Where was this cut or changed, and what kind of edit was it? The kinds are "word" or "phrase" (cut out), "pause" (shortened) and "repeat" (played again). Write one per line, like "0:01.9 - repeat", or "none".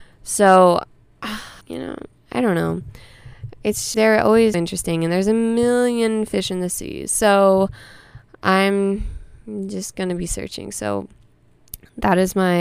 0:01.6 - pause
0:03.9 - word
0:04.5 - word